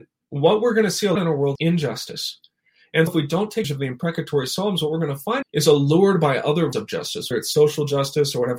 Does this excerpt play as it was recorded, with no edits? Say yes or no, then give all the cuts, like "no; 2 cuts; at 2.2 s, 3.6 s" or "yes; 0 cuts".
no; 7 cuts; at 1.2 s, 1.6 s, 3.1 s, 3.6 s, 5.4 s, 6.7 s, 7.3 s